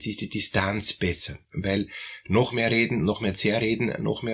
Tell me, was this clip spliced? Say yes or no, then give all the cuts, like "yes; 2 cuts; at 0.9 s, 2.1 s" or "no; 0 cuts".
no; 0 cuts